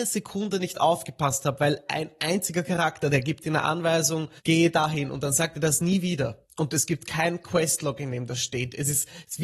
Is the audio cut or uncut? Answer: cut